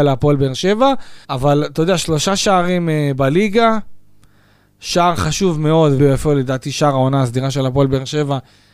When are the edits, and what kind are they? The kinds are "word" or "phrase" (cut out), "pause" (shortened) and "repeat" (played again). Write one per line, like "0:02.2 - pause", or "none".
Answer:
0:01.2 - pause
0:06.0 - word